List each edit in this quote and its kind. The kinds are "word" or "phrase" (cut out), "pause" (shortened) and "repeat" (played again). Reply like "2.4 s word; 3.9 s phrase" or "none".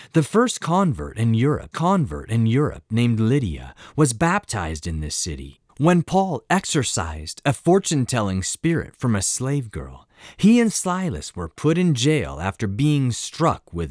1.7 s repeat; 5.7 s pause